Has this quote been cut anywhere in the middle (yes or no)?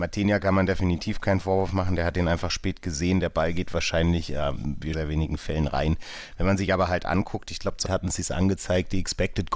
yes